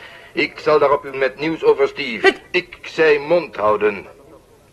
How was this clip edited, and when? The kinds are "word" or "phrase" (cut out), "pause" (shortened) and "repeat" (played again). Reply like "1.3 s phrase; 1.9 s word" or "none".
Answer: 1.1 s word